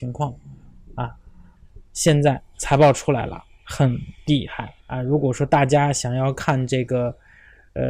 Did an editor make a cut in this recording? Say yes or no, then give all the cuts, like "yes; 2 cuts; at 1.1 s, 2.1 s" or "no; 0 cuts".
yes; 1 cut; at 4.8 s